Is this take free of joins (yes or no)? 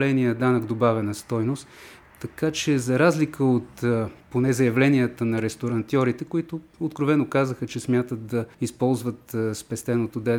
no